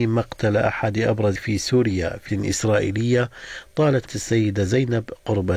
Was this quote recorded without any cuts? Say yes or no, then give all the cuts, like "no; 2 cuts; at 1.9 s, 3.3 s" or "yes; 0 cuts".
no; 3 cuts; at 1.4 s, 2.3 s, 4.1 s